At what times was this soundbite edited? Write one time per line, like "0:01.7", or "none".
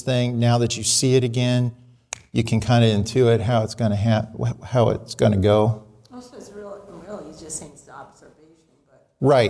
none